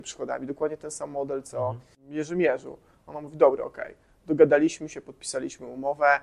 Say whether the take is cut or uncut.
uncut